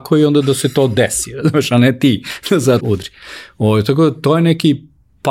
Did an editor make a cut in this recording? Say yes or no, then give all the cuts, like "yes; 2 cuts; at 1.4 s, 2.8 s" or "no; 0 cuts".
yes; 1 cut; at 2.8 s